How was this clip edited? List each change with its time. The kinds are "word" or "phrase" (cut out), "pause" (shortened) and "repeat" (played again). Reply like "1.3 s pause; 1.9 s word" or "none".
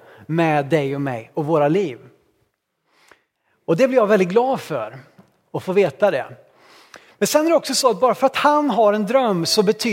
none